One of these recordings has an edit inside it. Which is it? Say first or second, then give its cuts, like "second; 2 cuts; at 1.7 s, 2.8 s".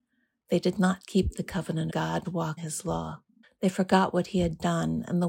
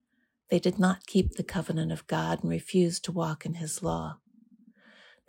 first; 4 cuts; at 1.9 s, 2.2 s, 2.6 s, 3.4 s